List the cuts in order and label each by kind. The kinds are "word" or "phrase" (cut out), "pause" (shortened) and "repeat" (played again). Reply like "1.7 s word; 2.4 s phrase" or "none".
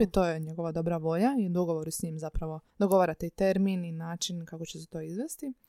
2.7 s pause